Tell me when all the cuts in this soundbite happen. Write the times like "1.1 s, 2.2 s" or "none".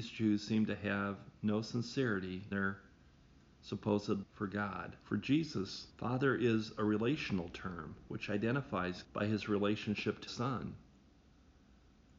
2.5 s, 4.2 s, 5.0 s, 5.9 s, 9.0 s, 10.3 s